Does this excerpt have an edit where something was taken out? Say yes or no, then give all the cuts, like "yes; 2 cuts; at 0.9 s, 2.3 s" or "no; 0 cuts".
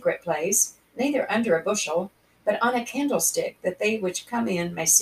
no; 0 cuts